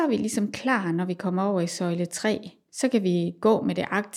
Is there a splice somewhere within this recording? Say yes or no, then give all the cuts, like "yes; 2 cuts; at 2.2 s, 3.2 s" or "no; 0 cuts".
no; 0 cuts